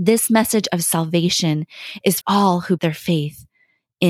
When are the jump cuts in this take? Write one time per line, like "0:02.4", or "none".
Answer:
0:02.2
0:02.8